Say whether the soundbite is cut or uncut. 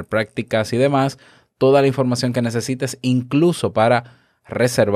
uncut